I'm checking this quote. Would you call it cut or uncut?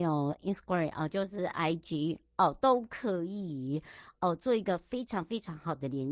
uncut